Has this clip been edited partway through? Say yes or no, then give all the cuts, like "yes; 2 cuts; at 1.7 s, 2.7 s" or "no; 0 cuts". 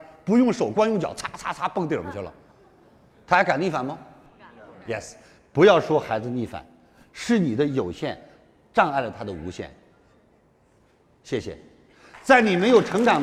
no; 0 cuts